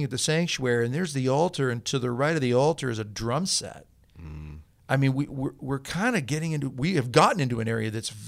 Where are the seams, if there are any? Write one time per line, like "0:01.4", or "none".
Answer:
none